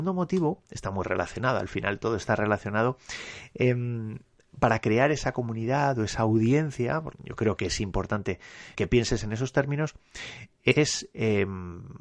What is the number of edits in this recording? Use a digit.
2